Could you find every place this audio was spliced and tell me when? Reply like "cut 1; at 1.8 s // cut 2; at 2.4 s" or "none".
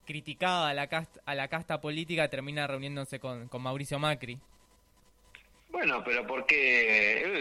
none